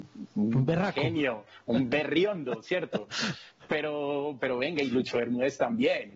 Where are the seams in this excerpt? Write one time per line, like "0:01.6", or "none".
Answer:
0:04.4

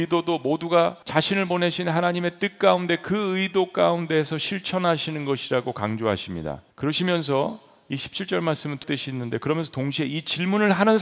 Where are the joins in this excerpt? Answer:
0:01.0
0:06.7
0:08.8

